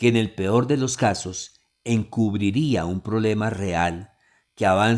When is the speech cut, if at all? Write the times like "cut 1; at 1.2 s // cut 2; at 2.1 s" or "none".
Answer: none